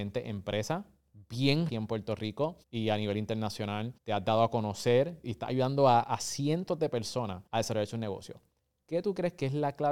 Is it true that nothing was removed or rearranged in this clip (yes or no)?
no